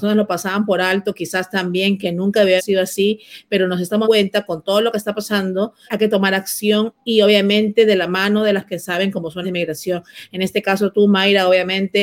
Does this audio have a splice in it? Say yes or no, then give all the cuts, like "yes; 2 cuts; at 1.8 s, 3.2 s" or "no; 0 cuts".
yes; 5 cuts; at 2.6 s, 4.0 s, 5.9 s, 8.7 s, 9.4 s